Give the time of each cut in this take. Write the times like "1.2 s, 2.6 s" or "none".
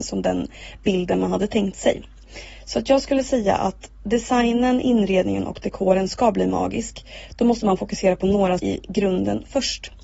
8.6 s